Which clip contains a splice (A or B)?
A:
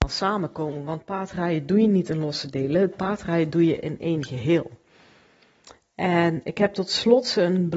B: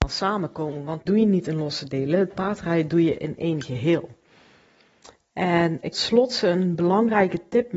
B